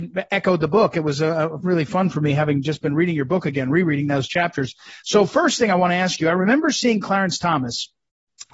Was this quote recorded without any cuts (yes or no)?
yes